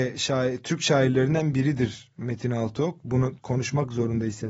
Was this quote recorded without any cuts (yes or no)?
no